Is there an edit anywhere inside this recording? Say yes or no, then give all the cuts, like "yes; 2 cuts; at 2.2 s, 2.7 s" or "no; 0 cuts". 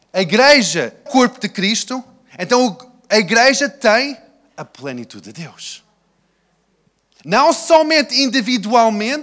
yes; 1 cut; at 1.1 s